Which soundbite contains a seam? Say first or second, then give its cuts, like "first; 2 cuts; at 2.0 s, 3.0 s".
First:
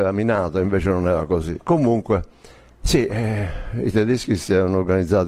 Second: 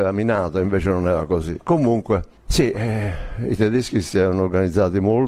second; 1 cut; at 2.4 s